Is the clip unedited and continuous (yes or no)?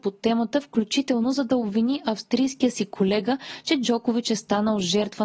yes